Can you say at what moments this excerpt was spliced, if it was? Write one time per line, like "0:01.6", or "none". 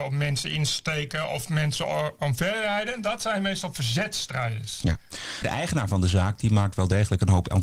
none